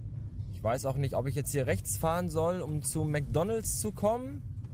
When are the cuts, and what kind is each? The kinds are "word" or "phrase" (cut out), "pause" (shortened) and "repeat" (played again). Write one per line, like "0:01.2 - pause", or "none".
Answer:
none